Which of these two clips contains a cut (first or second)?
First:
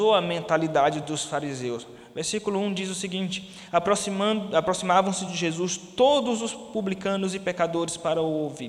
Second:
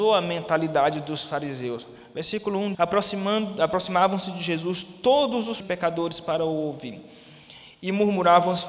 second